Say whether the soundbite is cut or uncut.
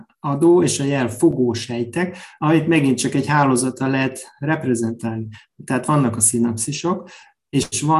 uncut